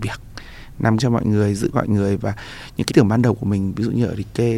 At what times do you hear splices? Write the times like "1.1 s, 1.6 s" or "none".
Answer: 1.0 s, 1.7 s, 2.9 s